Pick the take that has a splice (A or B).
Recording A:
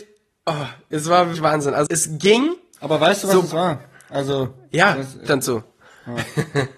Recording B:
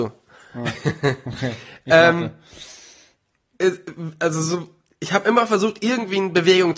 A